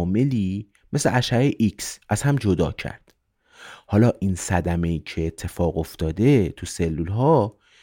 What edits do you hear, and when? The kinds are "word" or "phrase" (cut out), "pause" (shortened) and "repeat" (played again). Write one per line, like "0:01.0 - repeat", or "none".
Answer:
0:02.0 - pause